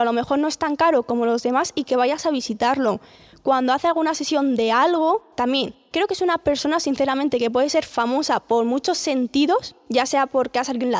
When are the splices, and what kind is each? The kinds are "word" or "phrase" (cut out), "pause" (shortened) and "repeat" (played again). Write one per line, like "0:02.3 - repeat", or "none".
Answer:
none